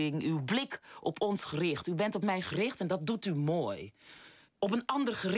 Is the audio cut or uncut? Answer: uncut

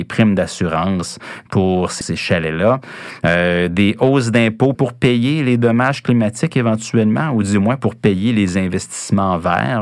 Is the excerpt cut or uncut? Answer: cut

